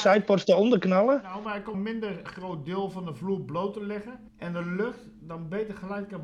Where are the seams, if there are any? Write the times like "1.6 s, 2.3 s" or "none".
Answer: 1.7 s, 2.3 s, 4.3 s